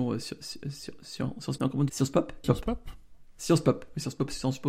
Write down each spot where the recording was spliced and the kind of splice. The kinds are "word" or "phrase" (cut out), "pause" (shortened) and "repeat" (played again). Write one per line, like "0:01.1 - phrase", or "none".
0:01.6 - word
0:01.9 - word
0:02.4 - word